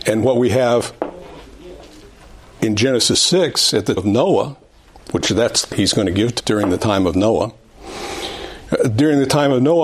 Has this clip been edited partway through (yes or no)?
yes